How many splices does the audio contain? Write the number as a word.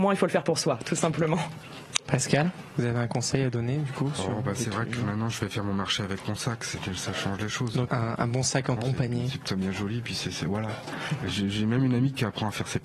two